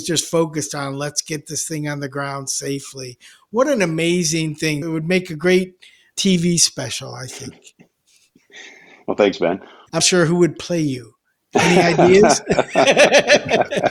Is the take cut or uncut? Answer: cut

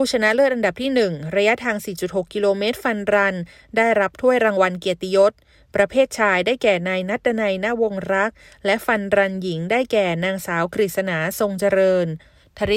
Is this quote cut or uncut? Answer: uncut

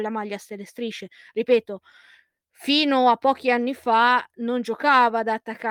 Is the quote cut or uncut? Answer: uncut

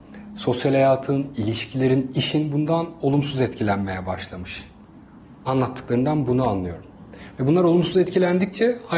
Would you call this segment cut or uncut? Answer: uncut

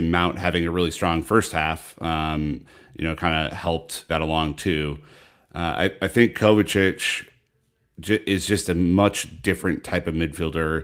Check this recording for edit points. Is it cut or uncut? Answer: cut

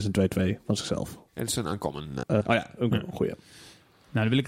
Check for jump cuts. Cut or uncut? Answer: cut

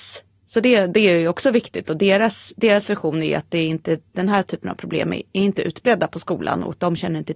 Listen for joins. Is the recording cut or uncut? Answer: uncut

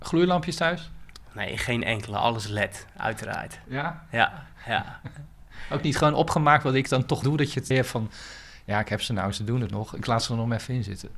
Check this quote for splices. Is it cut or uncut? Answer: cut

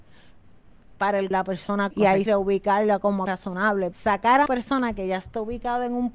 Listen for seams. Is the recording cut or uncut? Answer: cut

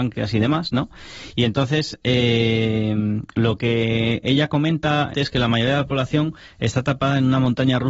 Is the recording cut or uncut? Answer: cut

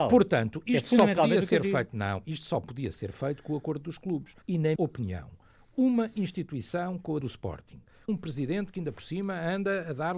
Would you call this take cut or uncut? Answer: cut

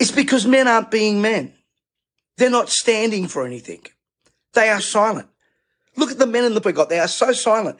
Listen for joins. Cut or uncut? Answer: cut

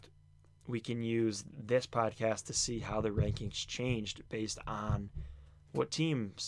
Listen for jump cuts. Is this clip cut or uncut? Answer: uncut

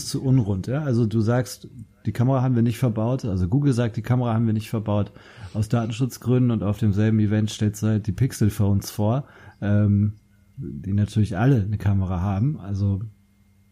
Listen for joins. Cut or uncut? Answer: uncut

